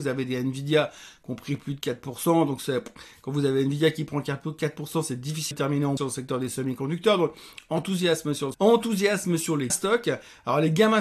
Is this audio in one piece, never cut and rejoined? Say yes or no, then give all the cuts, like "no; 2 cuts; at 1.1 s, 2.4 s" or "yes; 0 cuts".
no; 4 cuts; at 5.5 s, 6.0 s, 8.5 s, 9.7 s